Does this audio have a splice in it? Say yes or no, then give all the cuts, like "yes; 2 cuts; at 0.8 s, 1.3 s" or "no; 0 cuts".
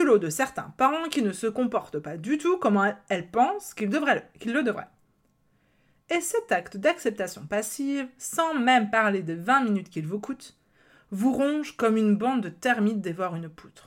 no; 0 cuts